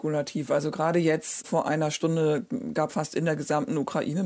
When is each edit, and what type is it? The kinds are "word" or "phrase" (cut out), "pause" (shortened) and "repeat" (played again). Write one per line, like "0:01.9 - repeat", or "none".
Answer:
0:02.9 - phrase